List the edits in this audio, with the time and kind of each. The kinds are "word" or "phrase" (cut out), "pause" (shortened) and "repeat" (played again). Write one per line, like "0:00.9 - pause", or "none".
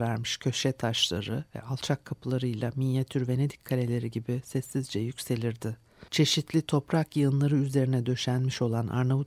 0:06.1 - pause

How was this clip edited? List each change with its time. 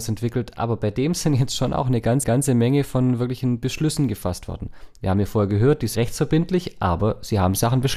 0:02.2 - repeat
0:06.0 - word

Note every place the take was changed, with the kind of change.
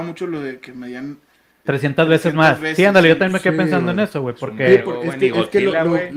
0:01.6 - word

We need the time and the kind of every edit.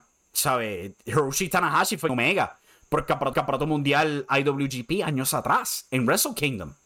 0:02.1 - phrase
0:03.3 - repeat

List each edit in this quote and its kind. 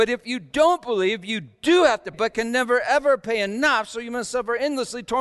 0:02.1 - word

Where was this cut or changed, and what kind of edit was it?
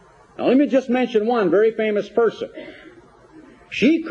none

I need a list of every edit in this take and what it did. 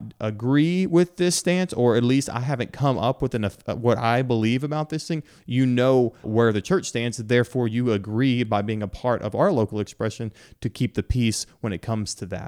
0:06.2 - word

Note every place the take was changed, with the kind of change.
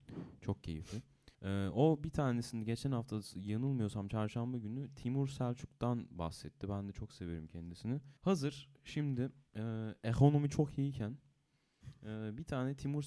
0:01.3 - pause
0:08.2 - pause
0:09.5 - pause

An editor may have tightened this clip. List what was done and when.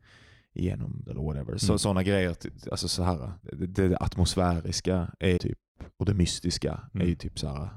0:01.1 - word
0:03.4 - pause
0:05.4 - word

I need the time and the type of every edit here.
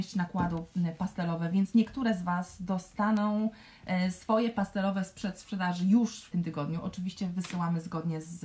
0:06.3 - phrase

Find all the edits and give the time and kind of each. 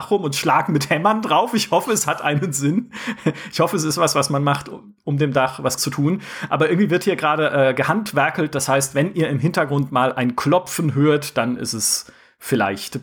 0:05.8 - word

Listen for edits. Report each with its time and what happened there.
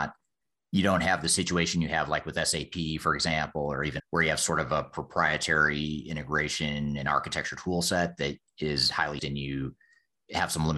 0:04.0 - word
0:09.2 - word

